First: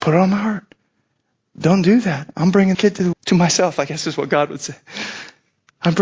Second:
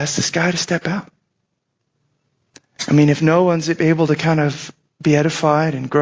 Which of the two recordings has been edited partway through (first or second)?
first